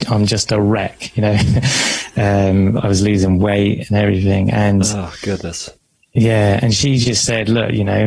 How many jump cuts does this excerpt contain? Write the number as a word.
zero